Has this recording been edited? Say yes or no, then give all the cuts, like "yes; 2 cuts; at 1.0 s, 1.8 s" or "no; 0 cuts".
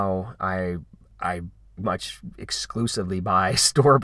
yes; 1 cut; at 1.8 s